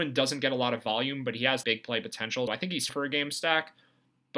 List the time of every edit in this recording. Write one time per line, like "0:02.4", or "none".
0:01.6
0:02.5
0:02.9